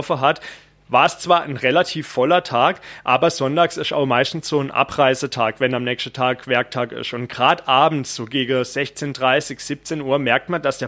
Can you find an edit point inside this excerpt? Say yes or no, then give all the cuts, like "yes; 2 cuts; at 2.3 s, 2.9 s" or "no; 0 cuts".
no; 0 cuts